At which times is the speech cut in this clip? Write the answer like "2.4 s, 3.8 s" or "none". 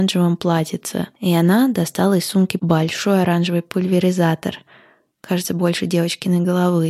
none